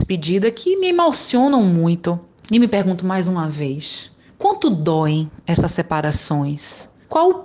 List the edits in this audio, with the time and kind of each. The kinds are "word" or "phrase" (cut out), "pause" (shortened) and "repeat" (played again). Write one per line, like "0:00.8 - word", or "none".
none